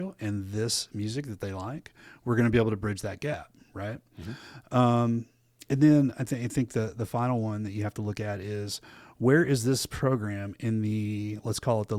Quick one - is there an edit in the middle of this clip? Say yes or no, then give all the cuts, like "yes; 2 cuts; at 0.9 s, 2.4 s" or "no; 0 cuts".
no; 0 cuts